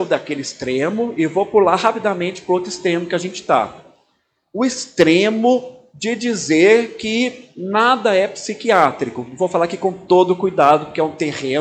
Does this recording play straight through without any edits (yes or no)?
yes